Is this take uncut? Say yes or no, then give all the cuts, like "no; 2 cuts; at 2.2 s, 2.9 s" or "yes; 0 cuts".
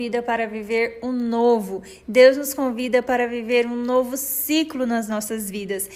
yes; 0 cuts